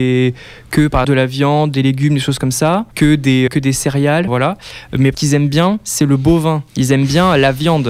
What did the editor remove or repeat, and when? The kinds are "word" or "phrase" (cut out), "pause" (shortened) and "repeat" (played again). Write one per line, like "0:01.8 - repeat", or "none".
0:01.0 - word
0:02.9 - pause
0:03.5 - word
0:04.3 - word
0:05.1 - phrase
0:06.7 - pause